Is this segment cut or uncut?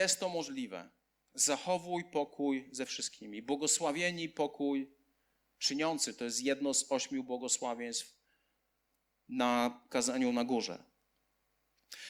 uncut